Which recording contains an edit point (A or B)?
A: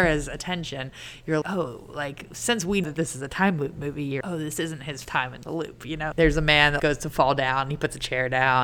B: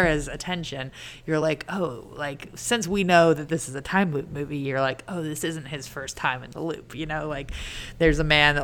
A